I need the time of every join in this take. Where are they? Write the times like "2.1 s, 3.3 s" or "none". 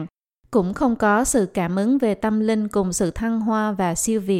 none